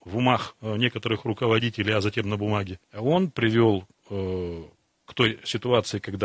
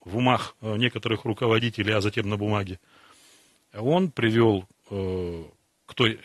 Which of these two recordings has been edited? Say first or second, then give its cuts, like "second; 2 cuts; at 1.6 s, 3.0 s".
first; 1 cut; at 2.8 s